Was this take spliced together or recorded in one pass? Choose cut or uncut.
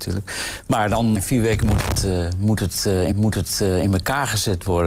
cut